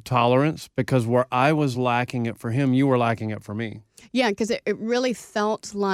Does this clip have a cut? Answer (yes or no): no